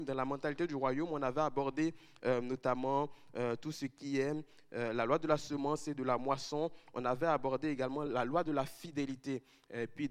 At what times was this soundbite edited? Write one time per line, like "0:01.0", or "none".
none